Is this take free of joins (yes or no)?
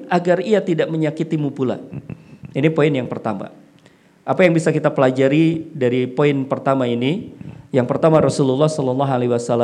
yes